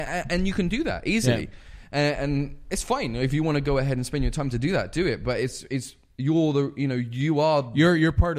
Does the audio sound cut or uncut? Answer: uncut